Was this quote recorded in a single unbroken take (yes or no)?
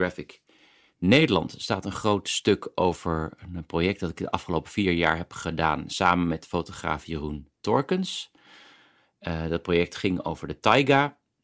yes